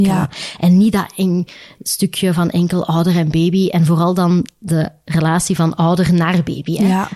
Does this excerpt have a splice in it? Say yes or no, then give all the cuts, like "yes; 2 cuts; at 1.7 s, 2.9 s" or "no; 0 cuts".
no; 0 cuts